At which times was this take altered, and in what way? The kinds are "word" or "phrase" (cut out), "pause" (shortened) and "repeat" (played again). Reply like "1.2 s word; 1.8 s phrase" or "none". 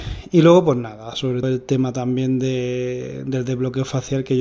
1.4 s word